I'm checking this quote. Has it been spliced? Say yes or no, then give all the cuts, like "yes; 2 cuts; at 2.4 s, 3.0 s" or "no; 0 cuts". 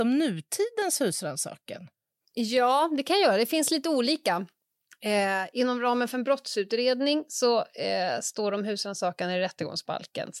no; 0 cuts